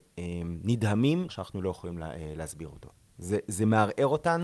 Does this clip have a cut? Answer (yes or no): yes